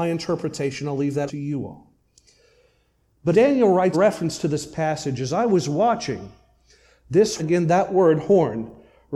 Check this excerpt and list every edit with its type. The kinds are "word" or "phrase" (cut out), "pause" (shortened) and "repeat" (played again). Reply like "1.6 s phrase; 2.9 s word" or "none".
1.3 s word; 3.3 s word; 3.9 s word; 7.4 s word